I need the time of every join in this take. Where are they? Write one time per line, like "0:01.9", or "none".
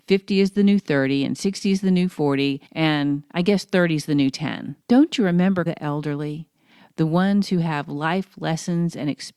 0:02.7
0:04.8
0:05.7